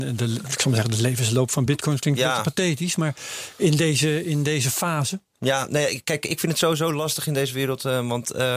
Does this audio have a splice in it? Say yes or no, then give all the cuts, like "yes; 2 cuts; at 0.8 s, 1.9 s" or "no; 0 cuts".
no; 0 cuts